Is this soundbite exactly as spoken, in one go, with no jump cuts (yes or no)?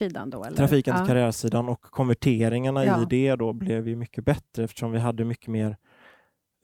yes